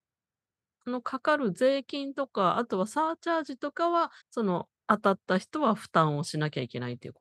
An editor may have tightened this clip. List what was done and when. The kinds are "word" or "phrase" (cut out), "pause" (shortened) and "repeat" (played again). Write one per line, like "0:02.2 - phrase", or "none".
0:04.2 - pause
0:04.8 - pause